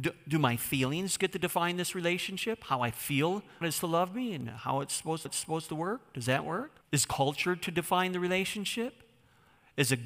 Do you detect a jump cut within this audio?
yes; 3 cuts; at 3.6 s, 5.2 s, 6.8 s

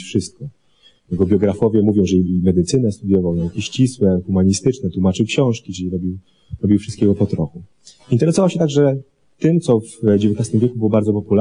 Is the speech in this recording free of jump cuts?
yes; 0 cuts

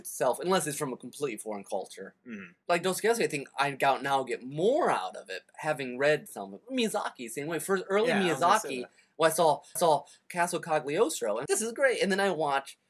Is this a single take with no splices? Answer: no; 2 cuts; at 9.8 s, 11.5 s

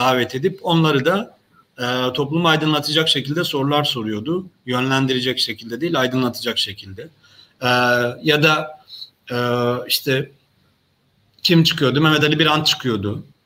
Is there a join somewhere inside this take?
no; 0 cuts

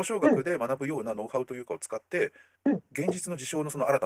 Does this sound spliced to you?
yes; 1 cut; at 2.6 s

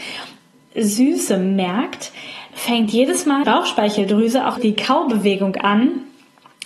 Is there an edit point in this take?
yes; 3 cuts; at 2.5 s, 3.4 s, 4.6 s

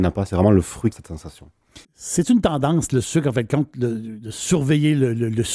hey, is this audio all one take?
no; 2 cuts; at 0.9 s, 1.8 s

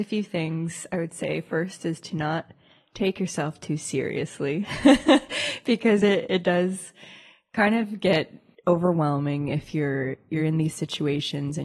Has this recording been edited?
no; 0 cuts

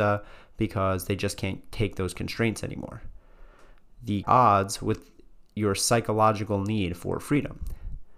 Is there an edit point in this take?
yes; 1 cut; at 4.2 s

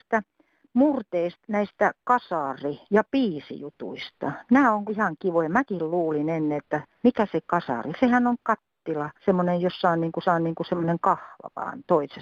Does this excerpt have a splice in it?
yes; 6 cuts; at 1.4 s, 2.9 s, 4.9 s, 6.9 s, 9.2 s, 10.2 s

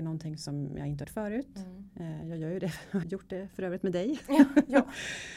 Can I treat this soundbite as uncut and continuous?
no; 2 cuts; at 1.0 s, 3.0 s

